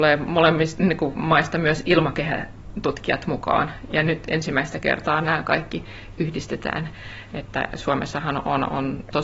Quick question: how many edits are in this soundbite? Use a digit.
0